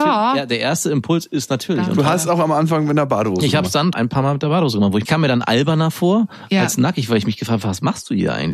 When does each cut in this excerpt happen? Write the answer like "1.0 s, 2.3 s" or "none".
3.9 s, 5.1 s